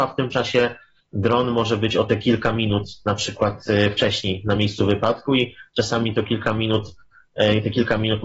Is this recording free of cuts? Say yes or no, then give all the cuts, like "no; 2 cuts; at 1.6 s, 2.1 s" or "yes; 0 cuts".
yes; 0 cuts